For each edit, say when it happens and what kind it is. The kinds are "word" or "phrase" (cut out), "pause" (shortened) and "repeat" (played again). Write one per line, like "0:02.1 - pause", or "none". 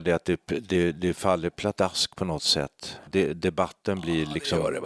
0:03.1 - word